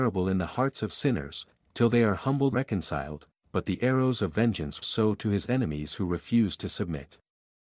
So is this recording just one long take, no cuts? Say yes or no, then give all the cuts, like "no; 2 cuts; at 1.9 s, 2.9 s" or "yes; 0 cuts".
no; 2 cuts; at 2.5 s, 4.8 s